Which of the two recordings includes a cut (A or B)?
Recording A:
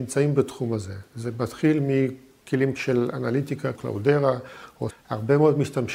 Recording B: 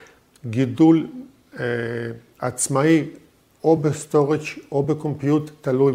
A